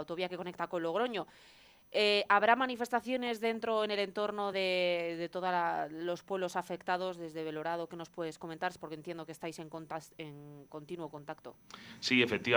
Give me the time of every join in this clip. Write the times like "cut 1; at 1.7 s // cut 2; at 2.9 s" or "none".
none